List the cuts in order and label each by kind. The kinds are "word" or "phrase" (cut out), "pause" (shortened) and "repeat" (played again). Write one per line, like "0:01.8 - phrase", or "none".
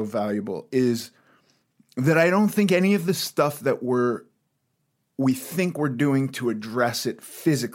none